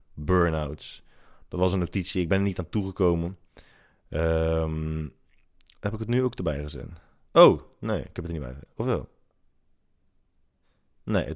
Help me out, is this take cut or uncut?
uncut